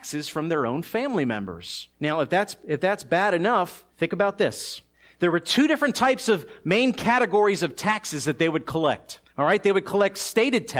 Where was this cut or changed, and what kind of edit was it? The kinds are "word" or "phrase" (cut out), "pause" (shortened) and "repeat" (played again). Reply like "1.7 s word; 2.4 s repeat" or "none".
1.9 s pause; 3.9 s pause; 4.9 s pause; 9.3 s pause